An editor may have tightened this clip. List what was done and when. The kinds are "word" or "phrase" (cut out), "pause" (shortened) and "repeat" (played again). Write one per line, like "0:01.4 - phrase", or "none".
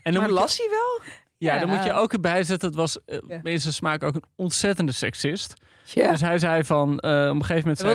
none